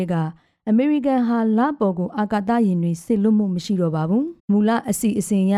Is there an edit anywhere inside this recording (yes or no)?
yes